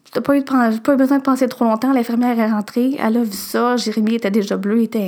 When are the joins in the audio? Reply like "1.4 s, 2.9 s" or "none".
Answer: none